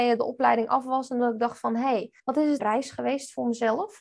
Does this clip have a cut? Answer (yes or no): yes